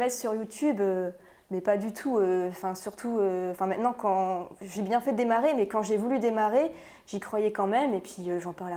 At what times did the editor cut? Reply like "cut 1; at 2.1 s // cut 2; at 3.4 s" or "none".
none

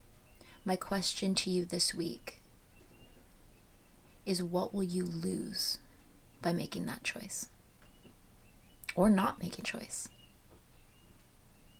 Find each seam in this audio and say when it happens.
cut 1; at 9.6 s

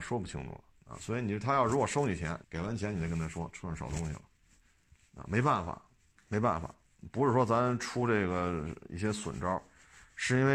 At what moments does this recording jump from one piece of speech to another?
cut 1; at 2.4 s // cut 2; at 4.6 s

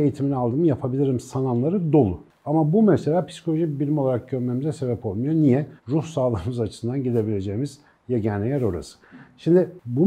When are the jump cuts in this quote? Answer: cut 1; at 5.8 s

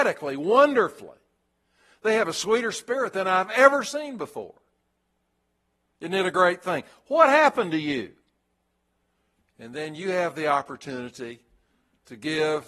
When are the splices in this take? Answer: none

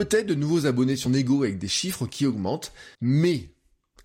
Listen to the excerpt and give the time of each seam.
cut 1; at 1.1 s // cut 2; at 2.9 s

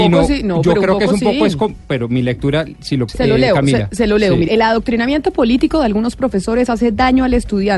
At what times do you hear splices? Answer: cut 1; at 3.1 s // cut 2; at 4.5 s

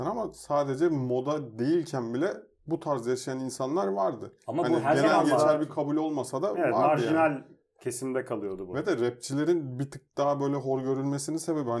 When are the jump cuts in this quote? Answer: none

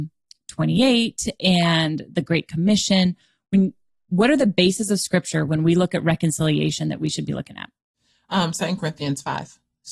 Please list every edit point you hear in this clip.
none

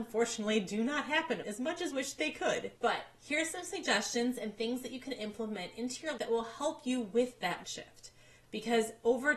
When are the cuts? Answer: cut 1; at 1.4 s // cut 2; at 1.9 s // cut 3; at 2.8 s // cut 4; at 6.2 s // cut 5; at 7.6 s

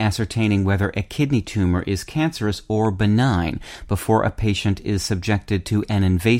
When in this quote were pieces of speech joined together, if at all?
none

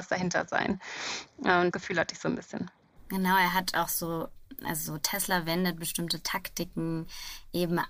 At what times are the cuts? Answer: cut 1; at 1.7 s

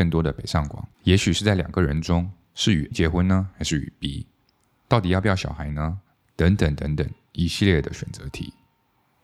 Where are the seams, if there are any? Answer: cut 1; at 0.9 s // cut 2; at 2.9 s

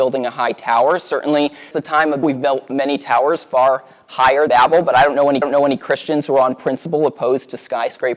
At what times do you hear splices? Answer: cut 1; at 1.7 s // cut 2; at 2.2 s // cut 3; at 4.5 s // cut 4; at 5.4 s

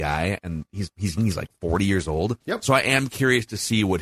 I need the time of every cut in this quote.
cut 1; at 1.2 s // cut 2; at 2.4 s

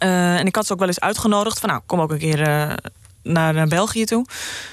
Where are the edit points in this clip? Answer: none

